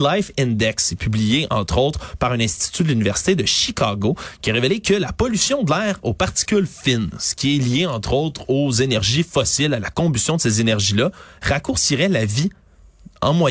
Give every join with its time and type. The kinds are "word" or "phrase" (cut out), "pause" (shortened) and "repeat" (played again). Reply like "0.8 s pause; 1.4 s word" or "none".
none